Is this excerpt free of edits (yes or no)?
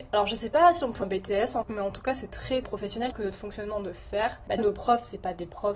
no